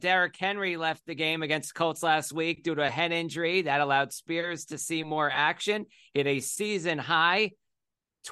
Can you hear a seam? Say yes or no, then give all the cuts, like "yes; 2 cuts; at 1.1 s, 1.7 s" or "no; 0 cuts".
no; 0 cuts